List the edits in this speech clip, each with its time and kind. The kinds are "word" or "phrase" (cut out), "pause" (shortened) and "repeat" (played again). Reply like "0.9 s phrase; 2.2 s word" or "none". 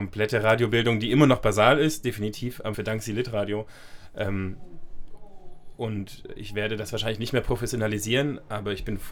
2.7 s word